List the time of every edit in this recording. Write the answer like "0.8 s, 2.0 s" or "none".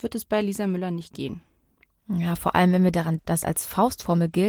3.2 s